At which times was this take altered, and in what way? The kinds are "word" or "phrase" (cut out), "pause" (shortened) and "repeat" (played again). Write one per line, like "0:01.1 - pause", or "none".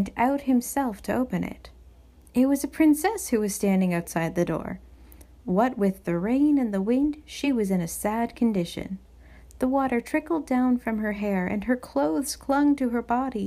none